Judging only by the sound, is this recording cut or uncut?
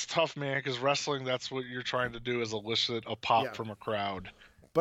uncut